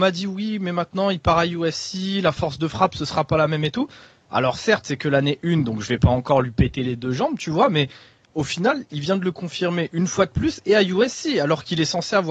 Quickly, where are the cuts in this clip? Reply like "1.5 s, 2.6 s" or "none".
none